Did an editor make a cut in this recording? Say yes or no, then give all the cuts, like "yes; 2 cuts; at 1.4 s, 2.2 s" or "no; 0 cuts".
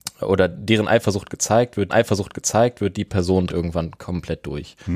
yes; 2 cuts; at 1.9 s, 3.5 s